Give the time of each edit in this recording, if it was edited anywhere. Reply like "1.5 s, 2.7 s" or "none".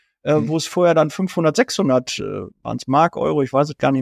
2.5 s